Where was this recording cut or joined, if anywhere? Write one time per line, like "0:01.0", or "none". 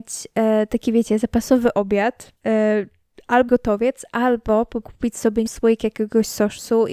0:02.4
0:03.5
0:04.8
0:05.5